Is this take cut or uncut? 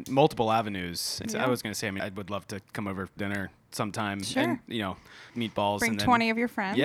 cut